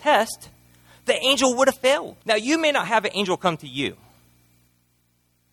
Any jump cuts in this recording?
yes; 1 cut; at 2.2 s

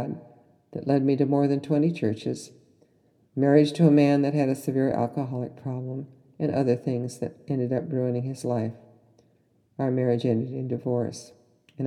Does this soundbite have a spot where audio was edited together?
no; 0 cuts

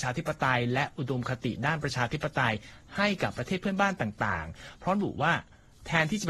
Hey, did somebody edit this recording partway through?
no; 0 cuts

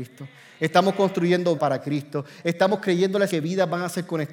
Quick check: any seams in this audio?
yes; 2 cuts; at 1.6 s, 3.3 s

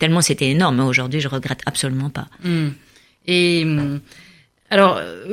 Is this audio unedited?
yes; 0 cuts

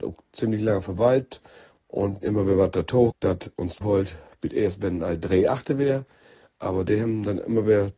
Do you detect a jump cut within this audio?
yes; 3 cuts; at 2.2 s, 3.1 s, 3.8 s

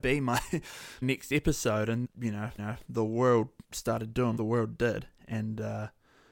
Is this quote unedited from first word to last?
no; 5 cuts; at 1.0 s, 2.0 s, 2.6 s, 3.6 s, 4.4 s

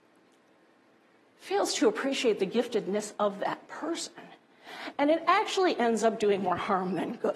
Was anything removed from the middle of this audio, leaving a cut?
no; 0 cuts

